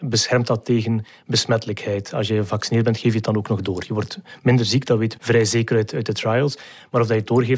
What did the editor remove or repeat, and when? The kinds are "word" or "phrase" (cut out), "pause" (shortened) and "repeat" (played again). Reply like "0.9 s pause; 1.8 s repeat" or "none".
5.1 s word